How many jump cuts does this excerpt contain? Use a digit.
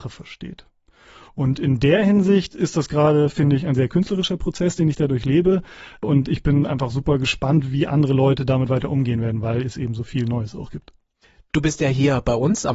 0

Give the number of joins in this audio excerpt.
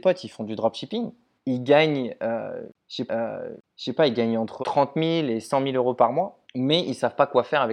4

